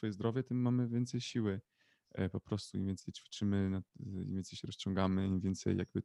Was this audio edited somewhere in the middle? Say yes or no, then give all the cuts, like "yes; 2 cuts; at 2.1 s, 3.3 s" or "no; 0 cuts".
no; 0 cuts